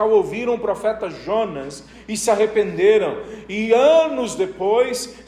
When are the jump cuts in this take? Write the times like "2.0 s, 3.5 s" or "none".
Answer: none